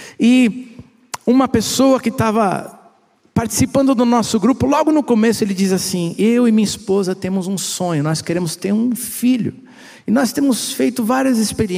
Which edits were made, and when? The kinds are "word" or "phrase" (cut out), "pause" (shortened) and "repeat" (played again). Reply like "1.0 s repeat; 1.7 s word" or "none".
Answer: none